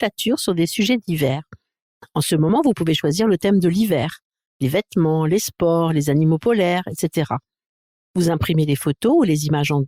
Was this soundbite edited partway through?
no; 0 cuts

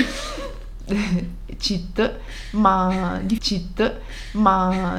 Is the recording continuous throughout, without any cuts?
no; 1 cut; at 3.4 s

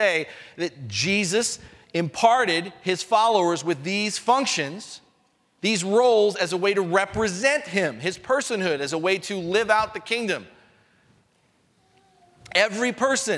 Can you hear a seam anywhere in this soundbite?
no; 0 cuts

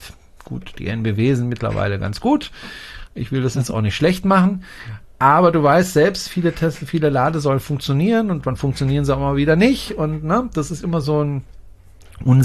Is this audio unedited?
yes; 0 cuts

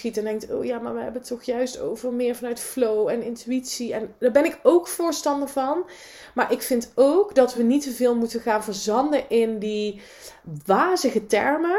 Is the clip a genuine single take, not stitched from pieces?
yes; 0 cuts

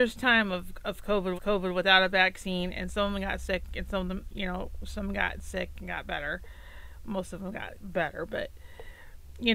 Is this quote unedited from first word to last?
no; 1 cut; at 1.4 s

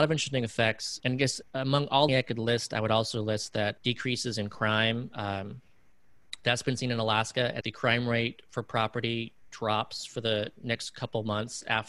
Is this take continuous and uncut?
no; 5 cuts; at 1.0 s, 1.4 s, 2.1 s, 3.8 s, 7.6 s

